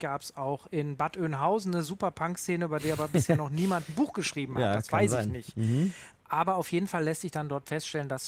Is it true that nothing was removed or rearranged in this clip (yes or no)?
yes